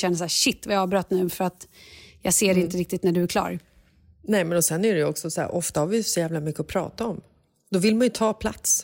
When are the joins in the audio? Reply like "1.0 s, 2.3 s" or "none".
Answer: none

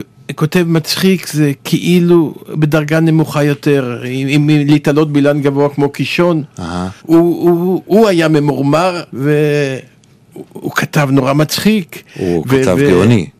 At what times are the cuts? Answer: 7.0 s, 9.1 s

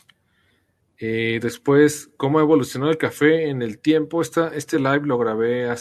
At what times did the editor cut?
none

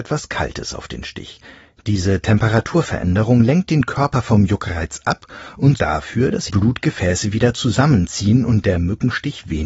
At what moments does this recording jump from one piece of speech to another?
5.8 s, 6.5 s

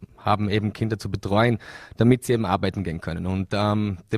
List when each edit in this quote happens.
none

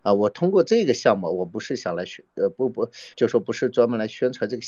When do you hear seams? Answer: 3.1 s

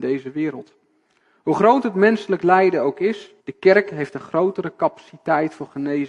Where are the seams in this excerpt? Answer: 3.4 s

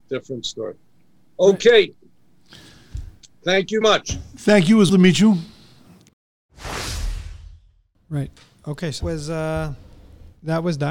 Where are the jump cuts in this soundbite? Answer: 3.8 s, 4.9 s, 9.0 s

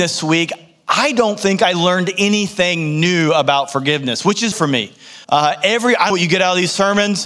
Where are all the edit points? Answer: 4.5 s, 5.2 s, 6.1 s

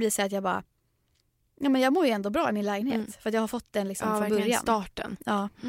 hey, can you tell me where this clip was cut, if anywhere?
none

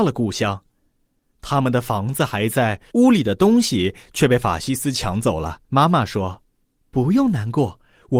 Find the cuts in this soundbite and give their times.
2.9 s, 5.6 s, 6.5 s

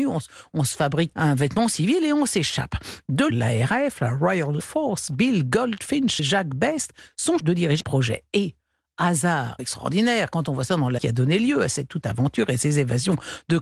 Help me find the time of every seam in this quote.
1.1 s, 3.3 s, 4.6 s, 6.2 s, 7.4 s, 7.8 s, 9.6 s, 11.0 s, 12.0 s

